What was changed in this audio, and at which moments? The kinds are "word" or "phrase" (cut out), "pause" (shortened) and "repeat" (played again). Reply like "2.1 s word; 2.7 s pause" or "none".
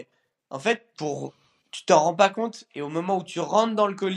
0.9 s word

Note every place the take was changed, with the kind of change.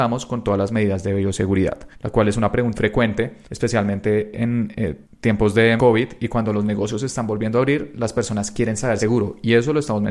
1.9 s pause; 2.7 s word; 3.4 s pause; 5.0 s pause; 5.8 s word; 9.0 s phrase

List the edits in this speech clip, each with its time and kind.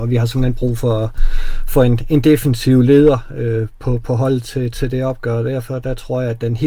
none

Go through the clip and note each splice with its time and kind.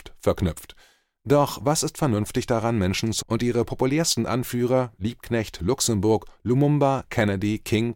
3.2 s word

